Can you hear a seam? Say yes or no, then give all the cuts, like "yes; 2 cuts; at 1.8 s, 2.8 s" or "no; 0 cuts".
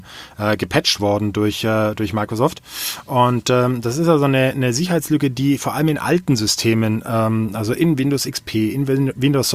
no; 0 cuts